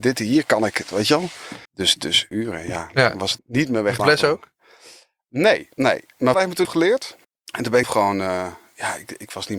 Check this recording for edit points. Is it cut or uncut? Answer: cut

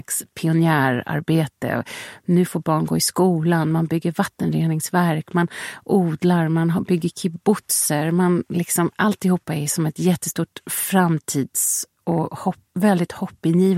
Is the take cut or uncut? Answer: uncut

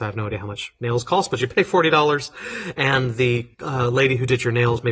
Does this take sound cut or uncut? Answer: cut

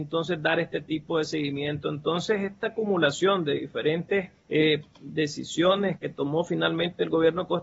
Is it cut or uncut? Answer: cut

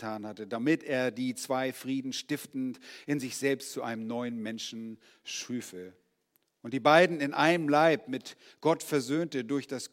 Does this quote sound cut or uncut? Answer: uncut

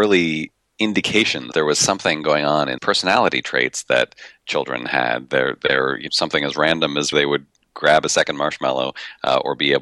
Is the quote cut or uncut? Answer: cut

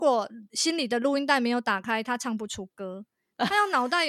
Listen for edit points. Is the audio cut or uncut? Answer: uncut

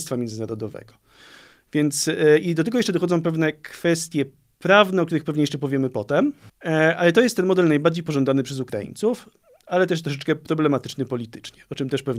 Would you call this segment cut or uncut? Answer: uncut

